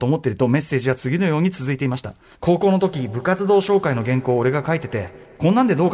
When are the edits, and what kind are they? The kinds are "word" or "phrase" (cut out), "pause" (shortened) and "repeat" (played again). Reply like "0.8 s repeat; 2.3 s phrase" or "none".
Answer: 2.3 s pause